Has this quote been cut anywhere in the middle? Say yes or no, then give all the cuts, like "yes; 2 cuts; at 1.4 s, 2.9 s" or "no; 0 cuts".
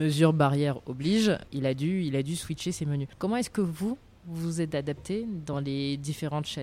no; 0 cuts